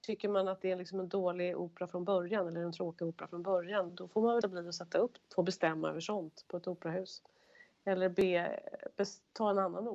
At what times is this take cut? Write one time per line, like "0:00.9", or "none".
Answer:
0:03.9
0:04.4
0:05.2